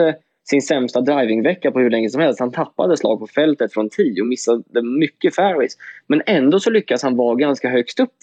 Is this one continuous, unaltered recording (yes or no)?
yes